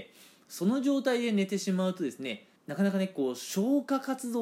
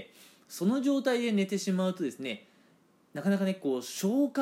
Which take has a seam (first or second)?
first